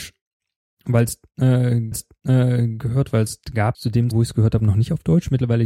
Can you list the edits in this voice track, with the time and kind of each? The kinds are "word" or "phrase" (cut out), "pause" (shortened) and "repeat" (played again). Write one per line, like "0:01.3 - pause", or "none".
0:01.9 - repeat
0:03.7 - word
0:04.1 - word